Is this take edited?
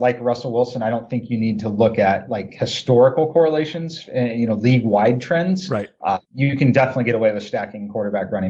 yes; 1 cut; at 6.2 s

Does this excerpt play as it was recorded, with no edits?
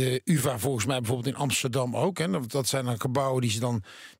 yes; 0 cuts

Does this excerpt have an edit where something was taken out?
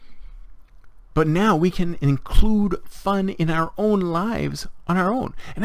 no; 0 cuts

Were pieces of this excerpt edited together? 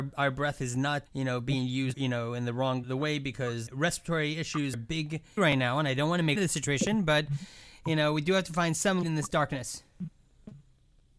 yes; 8 cuts; at 1.1 s, 1.9 s, 2.8 s, 3.7 s, 4.7 s, 5.4 s, 6.4 s, 9.0 s

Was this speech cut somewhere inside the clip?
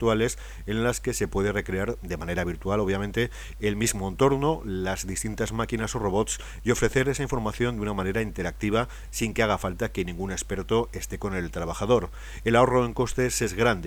no; 0 cuts

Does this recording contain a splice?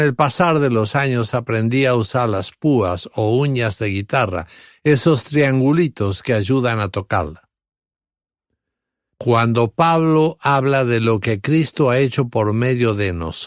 no; 0 cuts

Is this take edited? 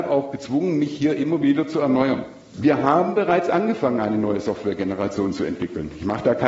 no; 0 cuts

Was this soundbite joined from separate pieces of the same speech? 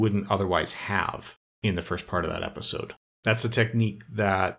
no; 0 cuts

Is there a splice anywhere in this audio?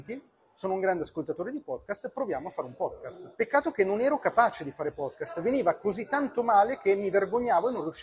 yes; 1 cut; at 3.3 s

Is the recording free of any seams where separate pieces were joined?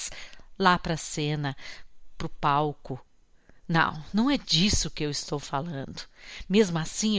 yes; 0 cuts

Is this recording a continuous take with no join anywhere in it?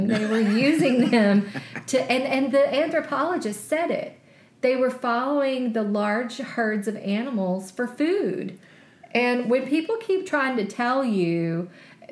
yes; 0 cuts

